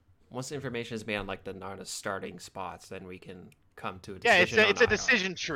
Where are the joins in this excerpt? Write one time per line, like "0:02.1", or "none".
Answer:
none